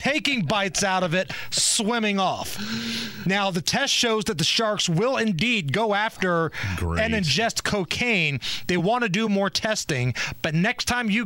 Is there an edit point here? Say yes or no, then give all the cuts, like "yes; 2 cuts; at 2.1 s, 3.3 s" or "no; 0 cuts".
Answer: no; 0 cuts